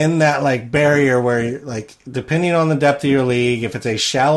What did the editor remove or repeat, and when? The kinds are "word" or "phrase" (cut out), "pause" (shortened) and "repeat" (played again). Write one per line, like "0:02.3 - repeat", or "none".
none